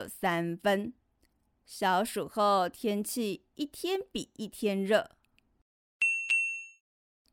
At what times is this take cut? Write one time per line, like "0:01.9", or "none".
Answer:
none